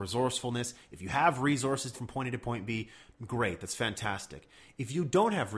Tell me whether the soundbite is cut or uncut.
cut